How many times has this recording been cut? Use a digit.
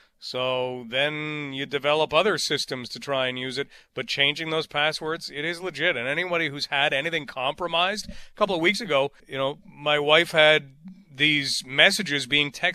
1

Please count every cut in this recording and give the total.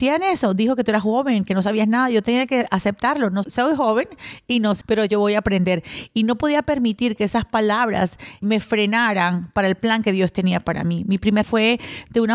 4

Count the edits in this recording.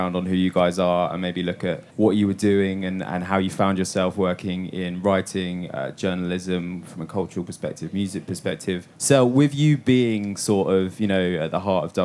2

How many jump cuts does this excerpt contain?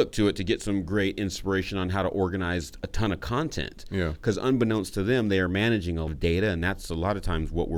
1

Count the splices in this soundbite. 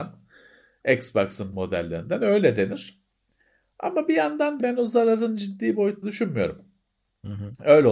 3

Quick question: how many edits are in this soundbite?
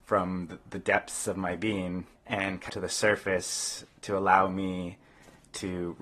2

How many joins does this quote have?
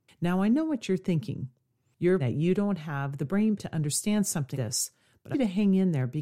4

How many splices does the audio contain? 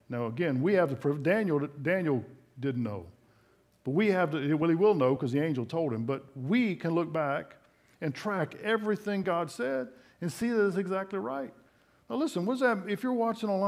0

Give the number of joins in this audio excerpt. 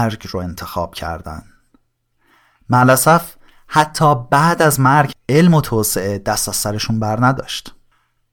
1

